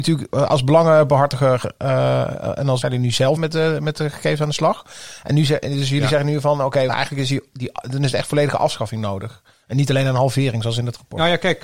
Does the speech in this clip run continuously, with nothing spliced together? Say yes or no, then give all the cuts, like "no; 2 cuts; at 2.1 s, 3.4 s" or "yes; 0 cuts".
no; 3 cuts; at 2.8 s, 3.4 s, 6.9 s